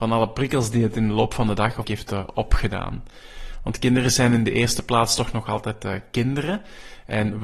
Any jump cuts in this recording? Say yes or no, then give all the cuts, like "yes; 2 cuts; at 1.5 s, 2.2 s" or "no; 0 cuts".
yes; 1 cut; at 1.8 s